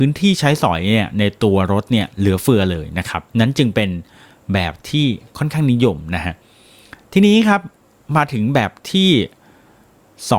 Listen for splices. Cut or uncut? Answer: cut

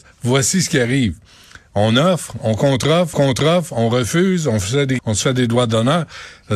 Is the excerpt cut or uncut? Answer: cut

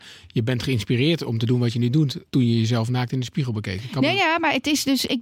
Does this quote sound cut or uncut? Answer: cut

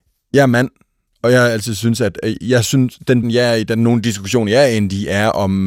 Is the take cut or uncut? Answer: cut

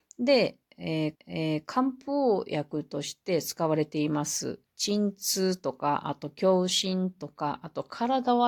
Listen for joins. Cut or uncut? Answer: cut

